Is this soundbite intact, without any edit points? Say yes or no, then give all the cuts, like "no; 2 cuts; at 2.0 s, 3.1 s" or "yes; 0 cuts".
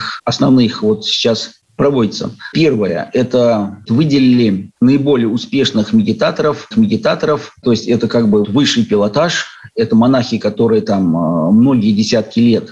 no; 3 cuts; at 4.8 s, 6.7 s, 8.4 s